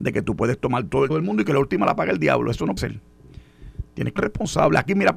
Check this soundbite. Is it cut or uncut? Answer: cut